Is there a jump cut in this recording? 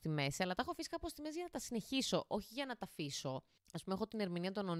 no; 0 cuts

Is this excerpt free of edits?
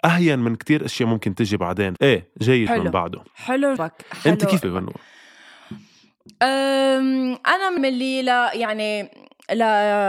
no; 5 cuts; at 2.0 s, 2.7 s, 3.8 s, 4.6 s, 7.8 s

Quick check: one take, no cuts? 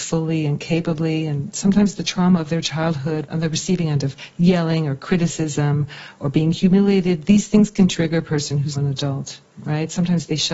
no; 2 cuts; at 3.3 s, 8.7 s

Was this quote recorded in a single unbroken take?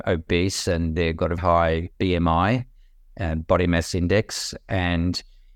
no; 2 cuts; at 1.4 s, 1.9 s

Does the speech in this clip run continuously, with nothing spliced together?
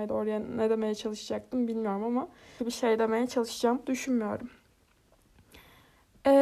no; 1 cut; at 2.6 s

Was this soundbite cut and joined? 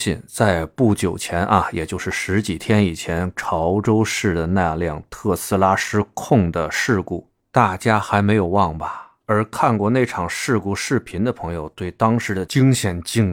yes; 1 cut; at 9.2 s

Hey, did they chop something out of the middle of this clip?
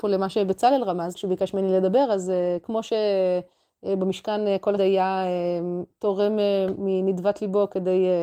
yes; 2 cuts; at 1.1 s, 4.8 s

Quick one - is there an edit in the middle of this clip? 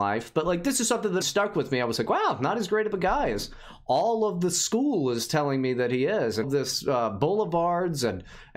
yes; 2 cuts; at 1.2 s, 6.4 s

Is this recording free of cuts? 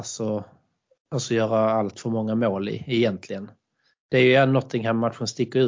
yes; 0 cuts

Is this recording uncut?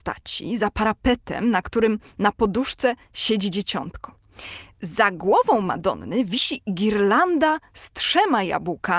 yes; 0 cuts

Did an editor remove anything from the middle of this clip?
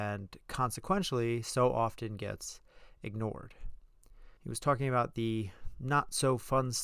yes; 1 cut; at 4.4 s

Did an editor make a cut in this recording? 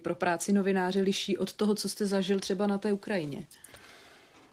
no; 0 cuts

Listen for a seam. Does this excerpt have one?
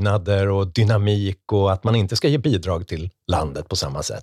no; 0 cuts

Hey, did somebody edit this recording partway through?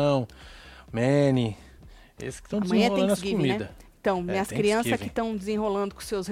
no; 0 cuts

